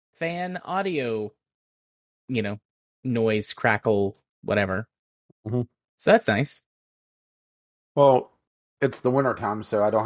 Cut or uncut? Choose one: uncut